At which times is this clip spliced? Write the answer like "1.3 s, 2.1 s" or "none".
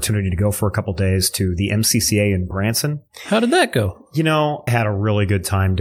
4.7 s